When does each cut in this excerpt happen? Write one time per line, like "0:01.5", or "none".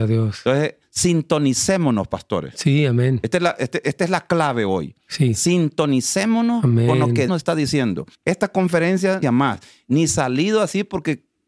0:07.3
0:08.1
0:09.2